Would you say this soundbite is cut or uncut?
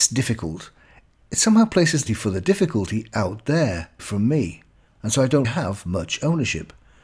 cut